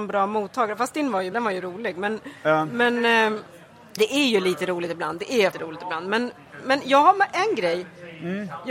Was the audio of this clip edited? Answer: yes; 3 cuts; at 1.3 s, 4.0 s, 5.5 s

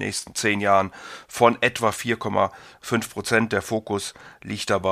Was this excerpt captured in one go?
yes; 0 cuts

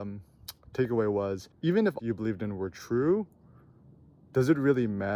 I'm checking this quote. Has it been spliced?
yes; 2 cuts; at 1.5 s, 2.0 s

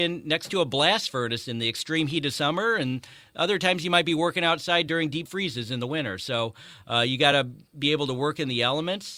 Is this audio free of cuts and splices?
yes; 0 cuts

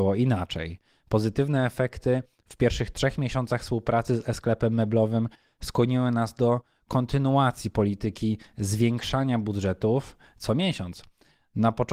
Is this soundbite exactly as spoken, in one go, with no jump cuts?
yes; 0 cuts

